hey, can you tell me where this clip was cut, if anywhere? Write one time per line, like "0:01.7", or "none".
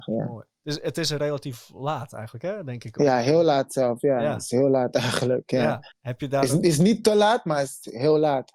0:05.9